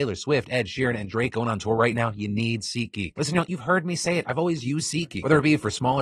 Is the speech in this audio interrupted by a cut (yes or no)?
no